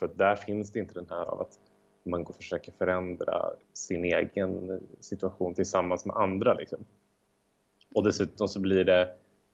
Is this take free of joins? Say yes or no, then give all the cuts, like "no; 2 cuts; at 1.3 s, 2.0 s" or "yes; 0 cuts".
no; 3 cuts; at 1.2 s, 2.3 s, 3.6 s